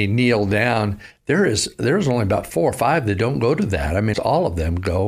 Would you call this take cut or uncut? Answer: cut